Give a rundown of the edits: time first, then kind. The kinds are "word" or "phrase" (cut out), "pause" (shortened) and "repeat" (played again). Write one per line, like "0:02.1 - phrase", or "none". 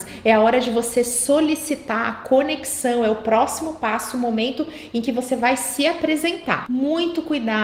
none